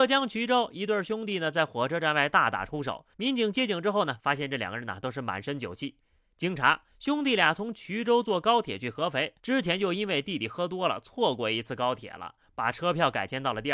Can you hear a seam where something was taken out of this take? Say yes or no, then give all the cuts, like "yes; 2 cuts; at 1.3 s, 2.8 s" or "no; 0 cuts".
yes; 4 cuts; at 3.1 s, 4.2 s, 6.9 s, 9.4 s